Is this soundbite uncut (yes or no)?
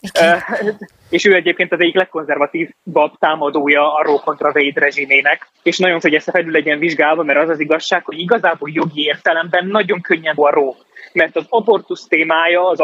no